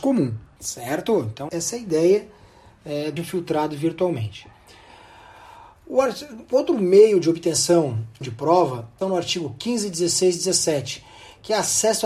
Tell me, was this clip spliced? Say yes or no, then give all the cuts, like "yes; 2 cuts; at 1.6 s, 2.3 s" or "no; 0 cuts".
yes; 4 cuts; at 1.5 s, 3.2 s, 8.2 s, 9.0 s